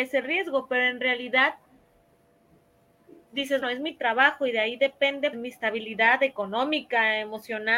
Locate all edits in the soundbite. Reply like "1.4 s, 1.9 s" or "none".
3.6 s, 5.3 s